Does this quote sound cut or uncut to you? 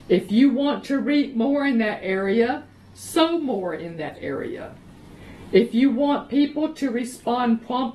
uncut